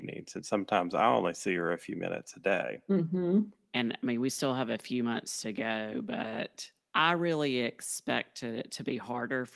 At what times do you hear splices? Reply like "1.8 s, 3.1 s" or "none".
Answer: none